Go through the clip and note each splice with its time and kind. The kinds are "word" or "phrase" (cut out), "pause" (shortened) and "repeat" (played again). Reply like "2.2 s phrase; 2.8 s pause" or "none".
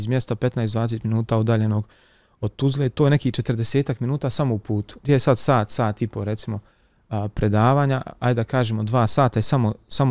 none